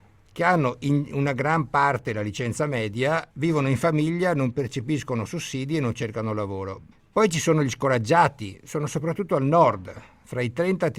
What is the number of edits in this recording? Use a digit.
2